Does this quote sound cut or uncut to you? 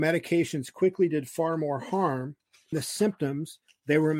cut